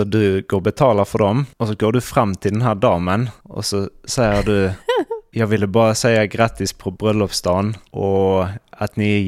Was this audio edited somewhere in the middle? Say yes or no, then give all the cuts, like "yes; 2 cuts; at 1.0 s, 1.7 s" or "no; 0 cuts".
yes; 1 cut; at 4.8 s